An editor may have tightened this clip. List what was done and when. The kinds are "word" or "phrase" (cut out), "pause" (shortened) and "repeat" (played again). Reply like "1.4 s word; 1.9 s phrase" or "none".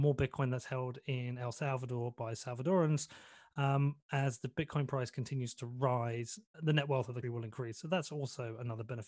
6.5 s word; 7.2 s word